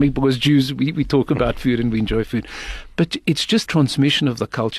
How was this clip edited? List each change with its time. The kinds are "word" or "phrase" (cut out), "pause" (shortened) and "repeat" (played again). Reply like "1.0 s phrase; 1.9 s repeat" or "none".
3.7 s word